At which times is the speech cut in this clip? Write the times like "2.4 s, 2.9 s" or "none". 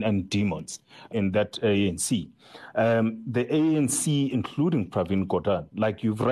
1.1 s, 4.3 s